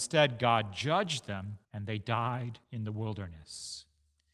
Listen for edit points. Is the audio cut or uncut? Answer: cut